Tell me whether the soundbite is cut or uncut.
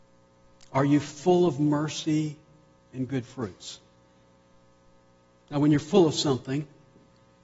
uncut